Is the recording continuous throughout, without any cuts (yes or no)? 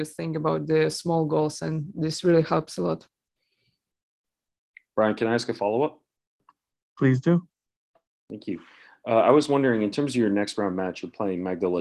yes